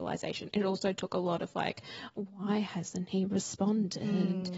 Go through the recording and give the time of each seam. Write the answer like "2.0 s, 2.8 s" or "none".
none